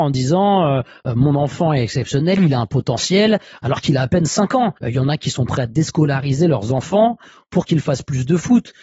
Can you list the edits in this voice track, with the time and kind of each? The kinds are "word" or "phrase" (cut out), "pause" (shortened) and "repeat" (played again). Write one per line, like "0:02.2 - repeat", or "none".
0:04.8 - pause